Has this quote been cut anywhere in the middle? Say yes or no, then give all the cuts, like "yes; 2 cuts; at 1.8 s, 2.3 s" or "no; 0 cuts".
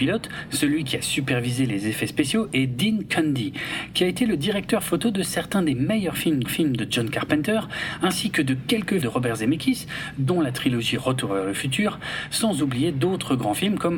yes; 2 cuts; at 6.4 s, 9.0 s